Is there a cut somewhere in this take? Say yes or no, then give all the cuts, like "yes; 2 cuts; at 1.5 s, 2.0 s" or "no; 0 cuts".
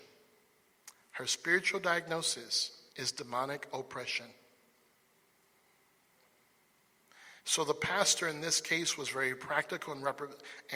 yes; 2 cuts; at 2.9 s, 7.4 s